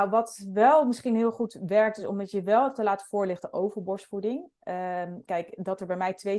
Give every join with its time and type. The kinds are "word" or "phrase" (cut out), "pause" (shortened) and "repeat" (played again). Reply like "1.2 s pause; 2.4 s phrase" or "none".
none